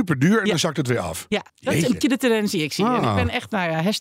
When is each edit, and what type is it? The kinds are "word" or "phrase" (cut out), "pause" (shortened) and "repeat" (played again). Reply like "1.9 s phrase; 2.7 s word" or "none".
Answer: 1.5 s pause; 2.0 s word